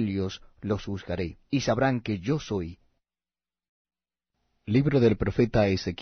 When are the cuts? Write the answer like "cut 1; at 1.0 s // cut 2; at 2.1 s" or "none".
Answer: cut 1; at 1.5 s